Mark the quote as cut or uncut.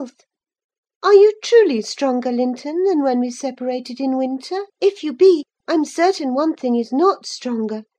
cut